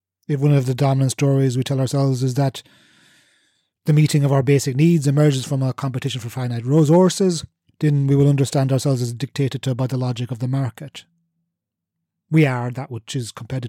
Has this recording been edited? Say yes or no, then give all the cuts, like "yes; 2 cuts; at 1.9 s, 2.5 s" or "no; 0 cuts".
no; 0 cuts